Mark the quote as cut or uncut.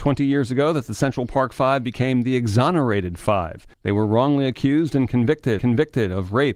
cut